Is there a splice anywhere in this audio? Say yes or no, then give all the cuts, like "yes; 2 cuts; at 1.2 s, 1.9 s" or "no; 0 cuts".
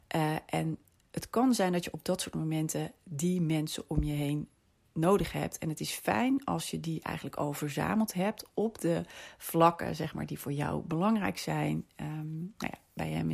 no; 0 cuts